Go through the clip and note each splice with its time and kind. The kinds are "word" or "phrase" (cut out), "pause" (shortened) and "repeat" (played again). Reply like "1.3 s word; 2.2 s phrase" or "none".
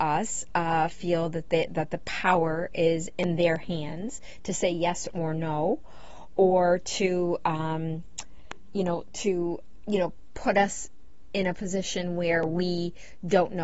9.8 s word